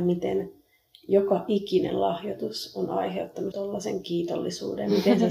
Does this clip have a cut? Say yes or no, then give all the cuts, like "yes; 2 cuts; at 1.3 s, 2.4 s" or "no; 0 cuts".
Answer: yes; 1 cut; at 3.5 s